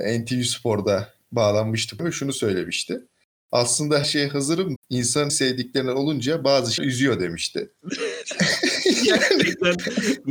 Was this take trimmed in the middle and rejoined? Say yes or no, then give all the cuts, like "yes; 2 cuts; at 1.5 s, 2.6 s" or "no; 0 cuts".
yes; 5 cuts; at 2.0 s, 4.0 s, 4.8 s, 5.3 s, 6.8 s